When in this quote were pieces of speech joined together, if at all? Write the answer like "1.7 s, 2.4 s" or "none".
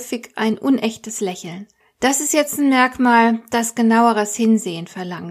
1.8 s